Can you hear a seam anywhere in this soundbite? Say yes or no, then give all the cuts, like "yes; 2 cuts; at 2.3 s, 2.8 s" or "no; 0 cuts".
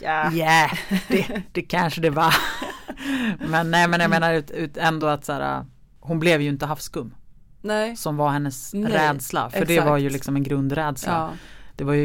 no; 0 cuts